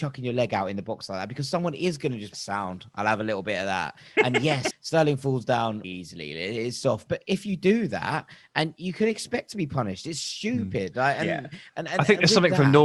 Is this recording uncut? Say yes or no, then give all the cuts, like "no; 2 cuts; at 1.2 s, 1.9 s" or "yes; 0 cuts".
no; 4 cuts; at 2.3 s, 4.7 s, 5.8 s, 7.1 s